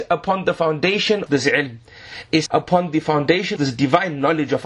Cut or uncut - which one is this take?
cut